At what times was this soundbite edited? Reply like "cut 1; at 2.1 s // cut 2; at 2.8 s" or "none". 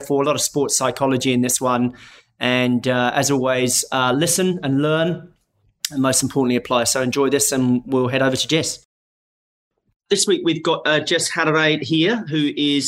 none